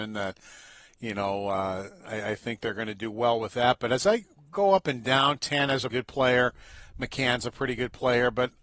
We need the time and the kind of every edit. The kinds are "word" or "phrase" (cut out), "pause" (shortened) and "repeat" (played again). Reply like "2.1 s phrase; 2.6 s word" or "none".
5.9 s word